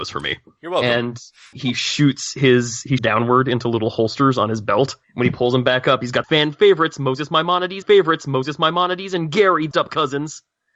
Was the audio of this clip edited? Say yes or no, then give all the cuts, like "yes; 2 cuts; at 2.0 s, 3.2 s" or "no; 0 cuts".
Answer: yes; 6 cuts; at 1.5 s, 3.0 s, 5.0 s, 6.2 s, 7.8 s, 9.7 s